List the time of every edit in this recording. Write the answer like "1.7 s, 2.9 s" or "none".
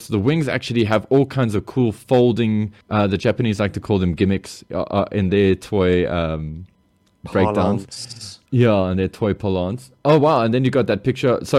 2.8 s, 8.5 s